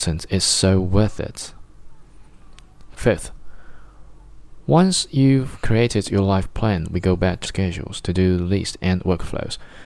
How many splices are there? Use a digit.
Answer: 1